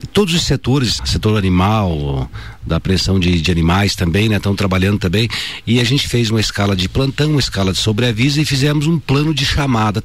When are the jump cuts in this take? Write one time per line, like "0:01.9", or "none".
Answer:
0:01.0

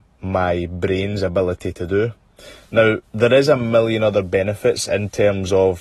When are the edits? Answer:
0:03.0

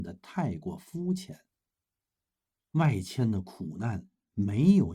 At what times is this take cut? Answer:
none

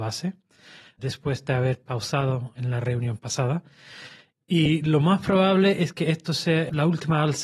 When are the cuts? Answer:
none

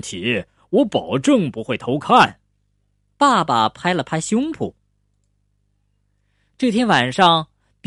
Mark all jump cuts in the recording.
none

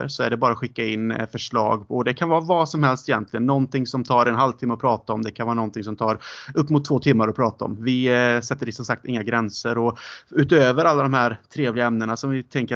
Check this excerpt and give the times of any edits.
none

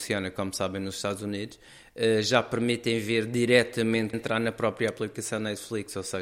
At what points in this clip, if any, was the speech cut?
0:04.1

